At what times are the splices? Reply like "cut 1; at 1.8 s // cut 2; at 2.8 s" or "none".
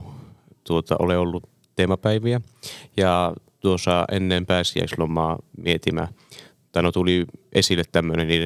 none